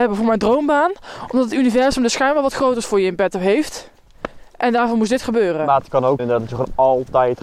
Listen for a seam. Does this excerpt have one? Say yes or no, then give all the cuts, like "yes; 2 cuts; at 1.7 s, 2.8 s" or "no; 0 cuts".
yes; 1 cut; at 6.2 s